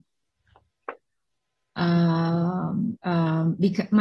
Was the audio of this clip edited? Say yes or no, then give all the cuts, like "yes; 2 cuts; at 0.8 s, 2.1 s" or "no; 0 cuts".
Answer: yes; 1 cut; at 3.0 s